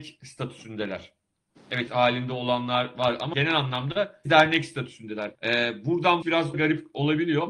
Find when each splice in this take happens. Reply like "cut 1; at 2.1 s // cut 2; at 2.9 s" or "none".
cut 1; at 1.9 s // cut 2; at 3.3 s // cut 3; at 4.3 s // cut 4; at 5.3 s // cut 5; at 6.2 s // cut 6; at 6.5 s